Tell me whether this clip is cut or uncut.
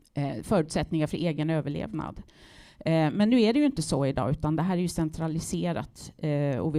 uncut